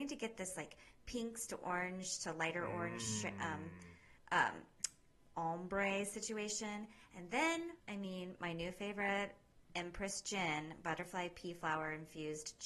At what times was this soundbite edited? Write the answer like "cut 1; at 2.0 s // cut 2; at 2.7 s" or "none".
cut 1; at 4.2 s // cut 2; at 7.8 s // cut 3; at 9.6 s